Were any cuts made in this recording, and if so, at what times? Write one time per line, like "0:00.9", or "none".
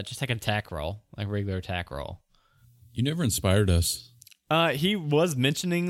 none

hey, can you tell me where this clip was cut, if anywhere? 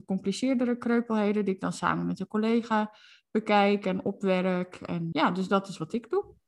0:05.1

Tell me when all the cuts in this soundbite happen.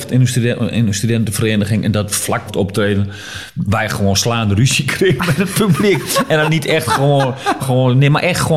0:02.5
0:07.6

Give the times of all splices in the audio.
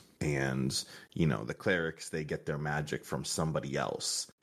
none

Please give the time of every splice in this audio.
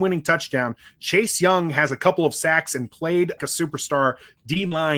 0:03.4

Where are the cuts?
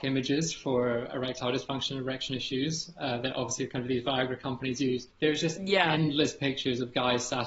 0:05.1

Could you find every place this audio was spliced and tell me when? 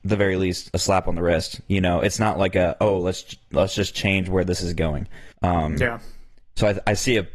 0:05.3

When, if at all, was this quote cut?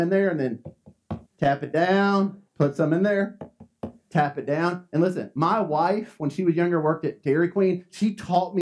0:01.3
0:02.5

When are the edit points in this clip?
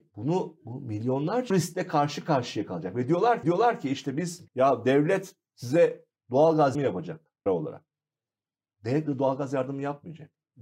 0:01.5
0:03.4
0:04.5
0:06.7
0:07.5

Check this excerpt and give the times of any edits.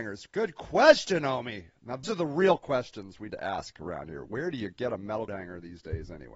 0:02.0
0:03.3
0:05.3

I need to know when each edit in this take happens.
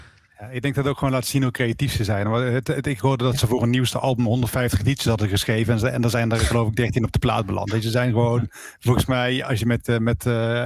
none

